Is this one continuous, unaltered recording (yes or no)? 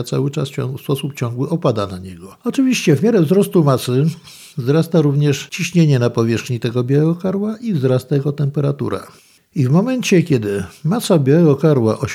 yes